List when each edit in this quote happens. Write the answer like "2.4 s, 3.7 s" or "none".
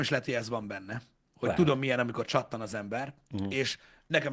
none

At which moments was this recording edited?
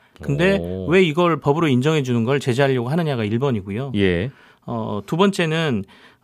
none

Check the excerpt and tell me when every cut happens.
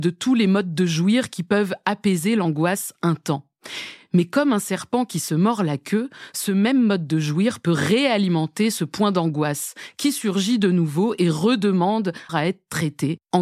12.3 s

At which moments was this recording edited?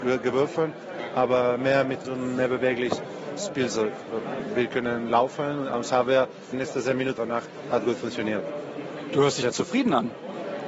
2.0 s, 3.4 s, 6.5 s, 7.2 s, 9.4 s

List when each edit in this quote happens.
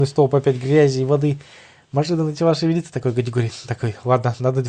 none

